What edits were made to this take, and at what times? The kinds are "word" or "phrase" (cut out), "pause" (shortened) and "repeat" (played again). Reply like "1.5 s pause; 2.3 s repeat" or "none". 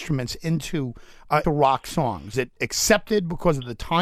1.4 s word; 2.3 s word